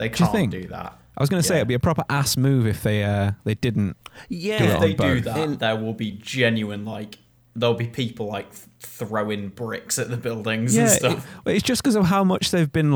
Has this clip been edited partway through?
no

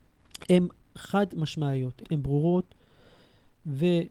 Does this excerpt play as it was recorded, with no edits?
no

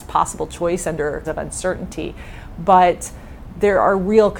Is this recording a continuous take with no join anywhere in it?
no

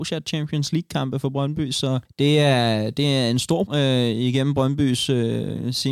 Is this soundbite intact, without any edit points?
no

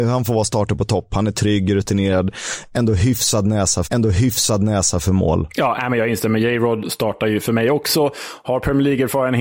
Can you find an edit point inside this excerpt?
yes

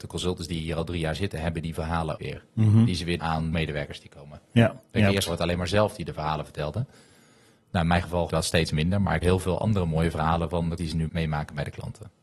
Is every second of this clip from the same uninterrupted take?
no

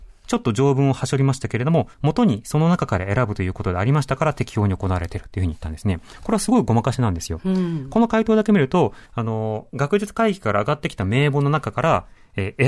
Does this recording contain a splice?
yes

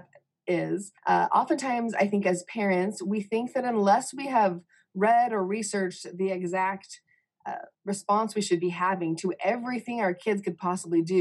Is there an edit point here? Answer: yes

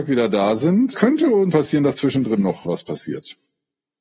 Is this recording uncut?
no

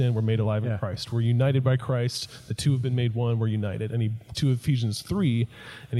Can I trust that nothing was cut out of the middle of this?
no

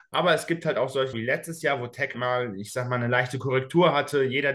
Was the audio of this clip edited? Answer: yes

